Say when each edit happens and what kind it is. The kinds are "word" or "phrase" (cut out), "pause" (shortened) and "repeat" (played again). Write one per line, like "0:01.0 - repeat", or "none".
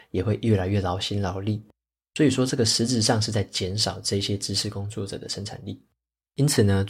none